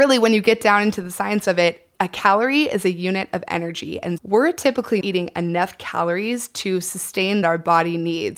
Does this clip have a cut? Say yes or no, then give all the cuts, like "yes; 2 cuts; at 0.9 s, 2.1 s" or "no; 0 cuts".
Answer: yes; 4 cuts; at 1.9 s, 4.2 s, 5.0 s, 7.4 s